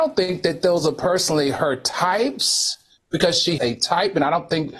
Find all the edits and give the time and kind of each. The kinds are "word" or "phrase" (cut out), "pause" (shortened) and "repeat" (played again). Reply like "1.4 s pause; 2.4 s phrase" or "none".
3.6 s word

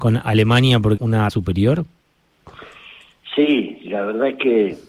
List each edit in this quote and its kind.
1.0 s word; 1.3 s word; 3.8 s word

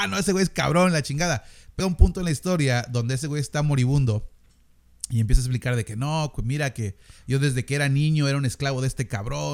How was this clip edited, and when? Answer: 1.8 s word

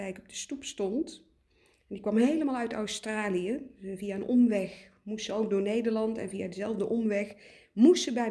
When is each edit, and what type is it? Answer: none

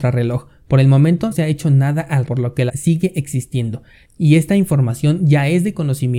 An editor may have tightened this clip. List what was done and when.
1.3 s word; 2.3 s word; 2.7 s word

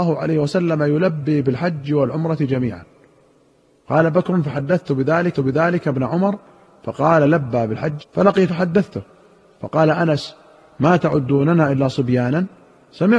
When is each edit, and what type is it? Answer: 5.3 s repeat; 8.0 s word; 8.5 s word

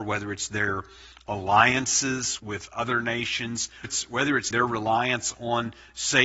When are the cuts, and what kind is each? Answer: 2.4 s word; 3.8 s word; 4.5 s word

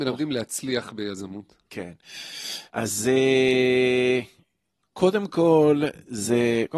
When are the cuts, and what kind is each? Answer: 2.7 s pause; 4.8 s word

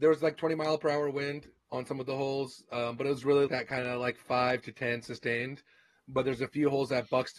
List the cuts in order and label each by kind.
3.5 s word

